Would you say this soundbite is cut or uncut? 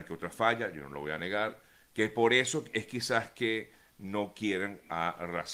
uncut